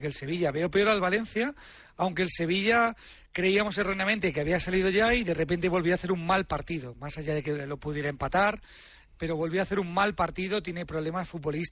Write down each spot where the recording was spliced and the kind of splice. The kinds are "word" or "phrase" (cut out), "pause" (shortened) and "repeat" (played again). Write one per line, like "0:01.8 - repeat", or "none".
none